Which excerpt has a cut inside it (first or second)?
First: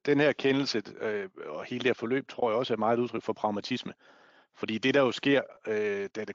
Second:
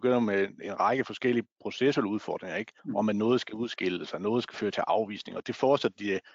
second